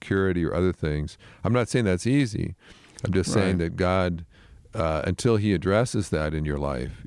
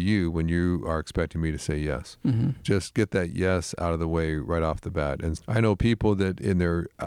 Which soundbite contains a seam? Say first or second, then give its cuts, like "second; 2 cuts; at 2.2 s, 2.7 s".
second; 1 cut; at 5.4 s